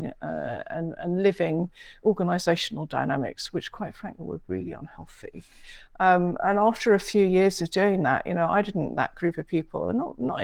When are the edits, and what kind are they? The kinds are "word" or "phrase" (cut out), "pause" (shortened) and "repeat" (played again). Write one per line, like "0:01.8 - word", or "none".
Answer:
none